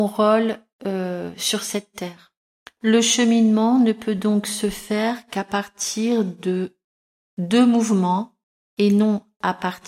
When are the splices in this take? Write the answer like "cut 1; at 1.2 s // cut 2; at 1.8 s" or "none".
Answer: none